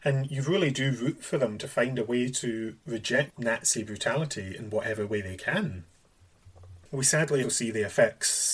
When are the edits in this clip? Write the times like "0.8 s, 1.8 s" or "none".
7.4 s